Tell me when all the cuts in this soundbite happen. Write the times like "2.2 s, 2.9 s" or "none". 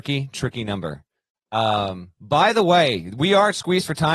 2.2 s